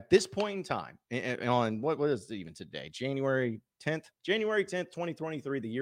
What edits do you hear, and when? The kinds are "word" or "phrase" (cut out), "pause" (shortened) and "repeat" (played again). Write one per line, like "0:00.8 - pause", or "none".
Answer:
0:04.1 - pause